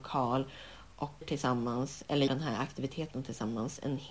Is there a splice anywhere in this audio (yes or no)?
yes